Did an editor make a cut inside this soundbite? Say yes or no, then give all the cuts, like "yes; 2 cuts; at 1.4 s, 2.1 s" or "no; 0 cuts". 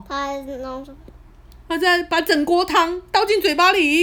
no; 0 cuts